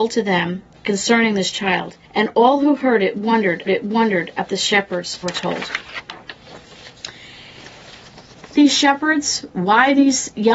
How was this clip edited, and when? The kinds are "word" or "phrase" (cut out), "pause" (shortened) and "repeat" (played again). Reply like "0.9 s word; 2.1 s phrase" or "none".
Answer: 2.0 s pause; 3.7 s repeat; 5.2 s phrase; 8.5 s word